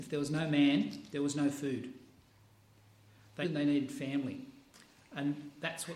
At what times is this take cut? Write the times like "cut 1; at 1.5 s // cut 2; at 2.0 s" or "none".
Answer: cut 1; at 3.4 s

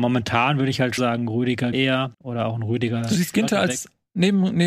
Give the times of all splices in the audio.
cut 1; at 1.0 s // cut 2; at 1.7 s // cut 3; at 2.1 s

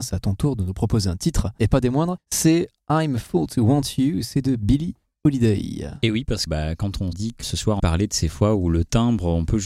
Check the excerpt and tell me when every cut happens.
cut 1; at 6.5 s // cut 2; at 7.1 s // cut 3; at 7.4 s // cut 4; at 7.8 s

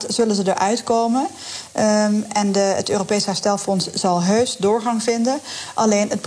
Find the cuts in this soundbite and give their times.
cut 1; at 2.3 s

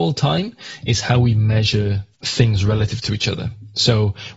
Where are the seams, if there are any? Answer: cut 1; at 2.1 s

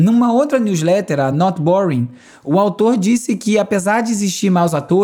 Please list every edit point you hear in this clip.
none

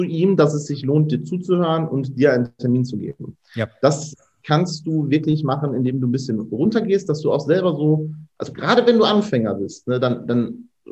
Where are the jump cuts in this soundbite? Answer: none

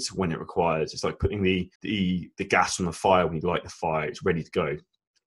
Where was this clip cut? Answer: cut 1; at 1.7 s

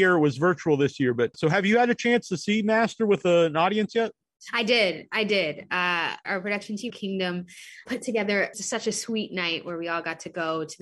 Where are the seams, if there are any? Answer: cut 1; at 1.3 s // cut 2; at 6.2 s // cut 3; at 6.9 s // cut 4; at 7.9 s // cut 5; at 8.5 s

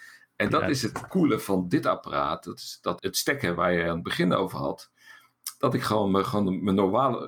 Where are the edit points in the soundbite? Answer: cut 1; at 1.1 s // cut 2; at 3.0 s

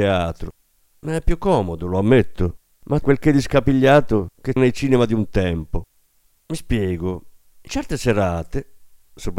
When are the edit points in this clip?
cut 1; at 3.0 s // cut 2; at 4.6 s // cut 3; at 7.7 s

